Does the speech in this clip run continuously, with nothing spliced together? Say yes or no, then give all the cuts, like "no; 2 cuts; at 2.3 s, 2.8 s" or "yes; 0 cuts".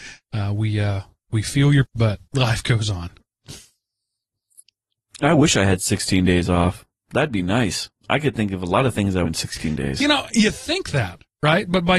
no; 3 cuts; at 1.9 s, 2.3 s, 9.2 s